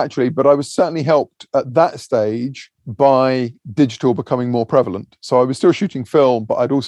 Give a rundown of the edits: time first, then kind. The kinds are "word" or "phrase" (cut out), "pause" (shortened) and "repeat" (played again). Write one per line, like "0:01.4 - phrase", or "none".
0:02.7 - pause